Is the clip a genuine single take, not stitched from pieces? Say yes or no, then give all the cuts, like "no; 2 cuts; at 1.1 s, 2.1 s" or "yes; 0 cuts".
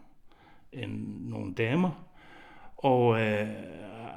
yes; 0 cuts